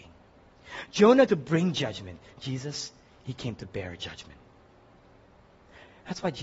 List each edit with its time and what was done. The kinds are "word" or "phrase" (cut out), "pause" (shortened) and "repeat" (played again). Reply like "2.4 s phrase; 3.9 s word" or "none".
1.3 s word